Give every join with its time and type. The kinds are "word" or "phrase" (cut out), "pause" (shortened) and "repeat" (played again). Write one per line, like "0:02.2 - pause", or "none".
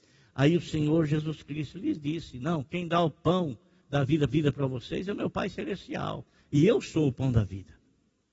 0:04.3 - repeat